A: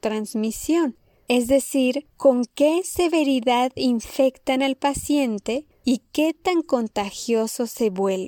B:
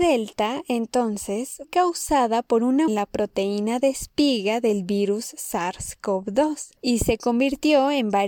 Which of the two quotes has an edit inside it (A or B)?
B